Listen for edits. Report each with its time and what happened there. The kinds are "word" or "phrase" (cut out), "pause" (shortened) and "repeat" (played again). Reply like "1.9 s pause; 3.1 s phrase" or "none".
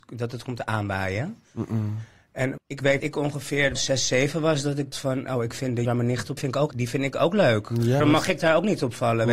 2.6 s word; 3.0 s word; 3.7 s word; 4.9 s word; 5.8 s word; 6.4 s word; 6.7 s word; 8.0 s word